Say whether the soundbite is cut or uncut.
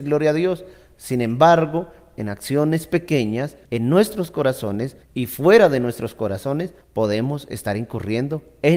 cut